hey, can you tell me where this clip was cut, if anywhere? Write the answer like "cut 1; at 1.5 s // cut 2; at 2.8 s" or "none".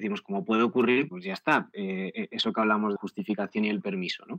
cut 1; at 1.1 s // cut 2; at 3.0 s

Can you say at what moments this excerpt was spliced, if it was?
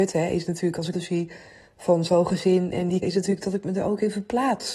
cut 1; at 0.9 s // cut 2; at 3.0 s

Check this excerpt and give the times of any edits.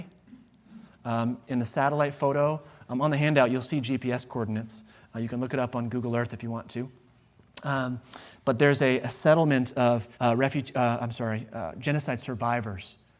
cut 1; at 10.1 s

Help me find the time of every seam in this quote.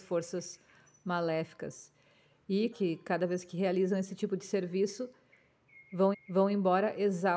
cut 1; at 2.7 s // cut 2; at 6.1 s

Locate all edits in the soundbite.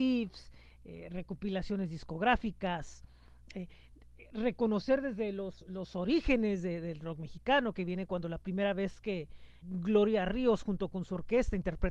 cut 1; at 9.6 s

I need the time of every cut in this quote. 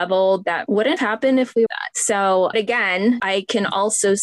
cut 1; at 1.0 s // cut 2; at 1.7 s // cut 3; at 2.5 s

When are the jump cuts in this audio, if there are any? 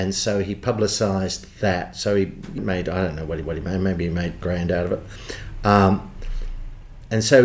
cut 1; at 2.6 s // cut 2; at 3.4 s // cut 3; at 4.4 s

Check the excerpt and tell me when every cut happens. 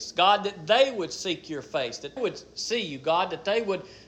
cut 1; at 2.2 s

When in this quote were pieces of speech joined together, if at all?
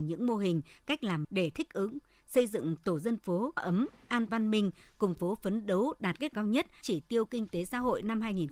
cut 1; at 1.2 s // cut 2; at 3.6 s // cut 3; at 4.3 s // cut 4; at 5.1 s // cut 5; at 6.3 s // cut 6; at 6.8 s

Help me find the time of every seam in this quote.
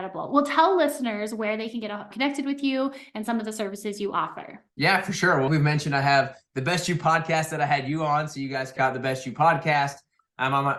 cut 1; at 2.1 s // cut 2; at 4.7 s // cut 3; at 5.5 s // cut 4; at 8.8 s

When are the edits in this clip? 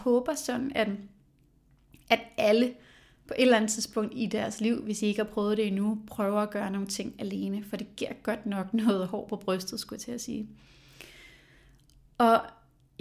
none

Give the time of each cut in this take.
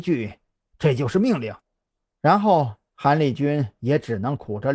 cut 1; at 1.6 s

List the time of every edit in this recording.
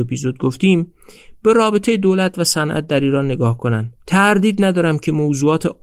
cut 1; at 4.0 s

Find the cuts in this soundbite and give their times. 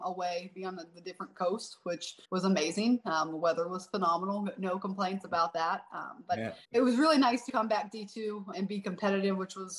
cut 1; at 2.2 s // cut 2; at 6.6 s // cut 3; at 7.5 s // cut 4; at 8.5 s

